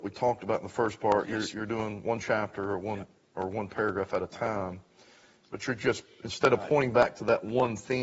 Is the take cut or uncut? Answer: uncut